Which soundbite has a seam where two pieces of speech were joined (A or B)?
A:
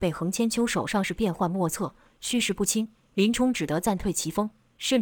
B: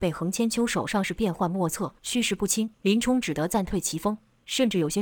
B